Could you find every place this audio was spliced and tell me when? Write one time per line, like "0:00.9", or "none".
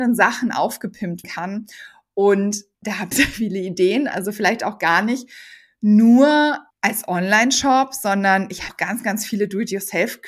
0:01.2
0:02.7
0:03.1
0:06.7
0:08.7